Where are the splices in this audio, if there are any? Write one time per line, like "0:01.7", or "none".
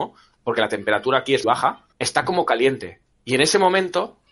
0:01.4
0:01.9
0:03.1